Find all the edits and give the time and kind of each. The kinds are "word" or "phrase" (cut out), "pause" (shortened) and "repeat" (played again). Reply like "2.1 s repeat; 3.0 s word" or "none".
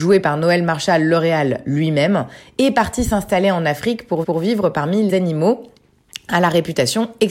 4.2 s repeat; 5.1 s word